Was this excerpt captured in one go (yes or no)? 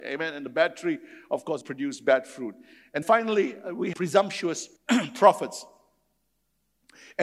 no